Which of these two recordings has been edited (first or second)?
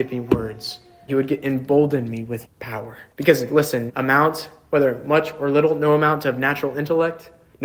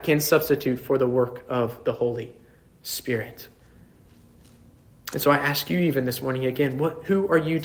first